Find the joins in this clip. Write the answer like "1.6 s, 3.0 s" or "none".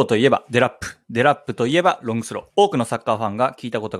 2.5 s